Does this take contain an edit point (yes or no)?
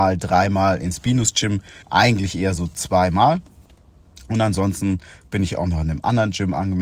yes